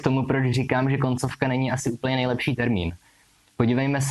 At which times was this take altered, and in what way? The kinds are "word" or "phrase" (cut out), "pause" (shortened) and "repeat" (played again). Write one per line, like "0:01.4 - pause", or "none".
none